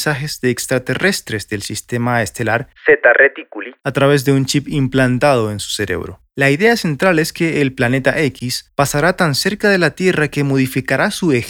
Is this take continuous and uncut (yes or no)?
no